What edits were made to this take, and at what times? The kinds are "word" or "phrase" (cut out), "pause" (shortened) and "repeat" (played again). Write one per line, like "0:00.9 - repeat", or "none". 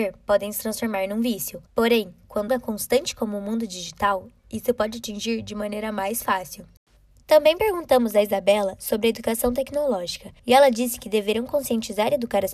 0:01.7 - pause
0:02.5 - word
0:10.4 - pause